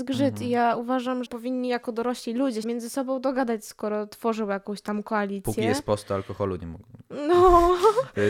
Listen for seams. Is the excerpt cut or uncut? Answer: cut